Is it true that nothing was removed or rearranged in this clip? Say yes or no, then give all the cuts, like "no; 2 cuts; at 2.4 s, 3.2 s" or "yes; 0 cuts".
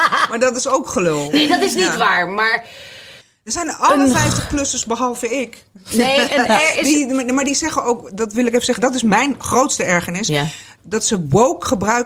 no; 1 cut; at 3.2 s